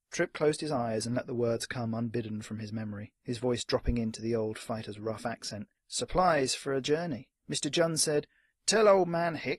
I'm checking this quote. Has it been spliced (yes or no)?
yes